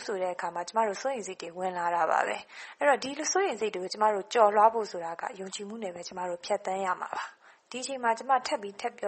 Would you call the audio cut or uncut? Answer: cut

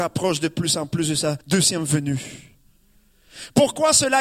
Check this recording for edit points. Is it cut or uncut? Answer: cut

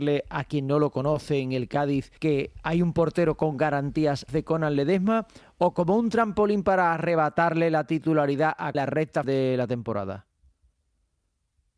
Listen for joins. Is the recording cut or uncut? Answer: cut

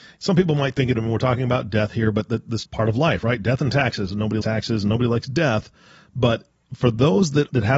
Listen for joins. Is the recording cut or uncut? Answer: cut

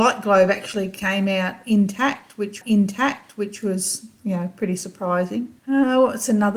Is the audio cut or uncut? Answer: cut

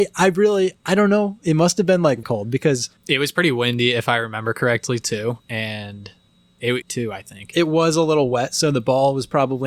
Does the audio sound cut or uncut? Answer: cut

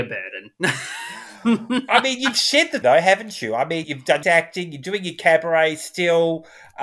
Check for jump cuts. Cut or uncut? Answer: cut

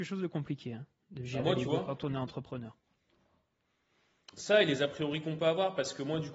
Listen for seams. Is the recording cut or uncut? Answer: uncut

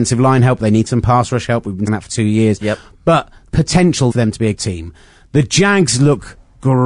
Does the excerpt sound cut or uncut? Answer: cut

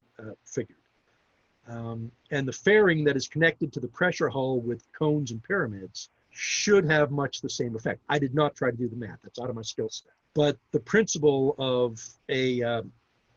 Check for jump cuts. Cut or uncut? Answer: cut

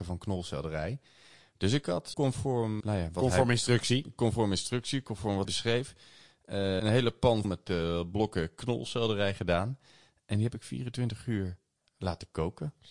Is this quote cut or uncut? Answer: cut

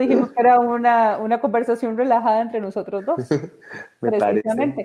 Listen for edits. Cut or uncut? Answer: uncut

